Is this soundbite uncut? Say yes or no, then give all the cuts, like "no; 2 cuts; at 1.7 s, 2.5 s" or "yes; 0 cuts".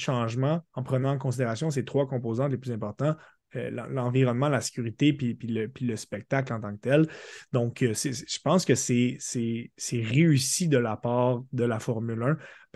yes; 0 cuts